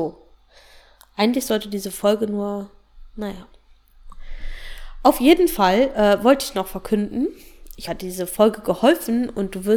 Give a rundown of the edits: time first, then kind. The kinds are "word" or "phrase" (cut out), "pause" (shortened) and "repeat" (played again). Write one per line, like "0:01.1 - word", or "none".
0:07.9 - phrase